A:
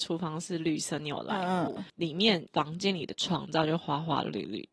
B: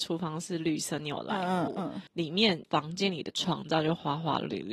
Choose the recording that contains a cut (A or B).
A